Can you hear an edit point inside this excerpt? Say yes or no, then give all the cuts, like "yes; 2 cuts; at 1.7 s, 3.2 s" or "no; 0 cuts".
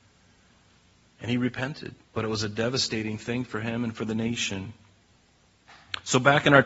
yes; 1 cut; at 2.0 s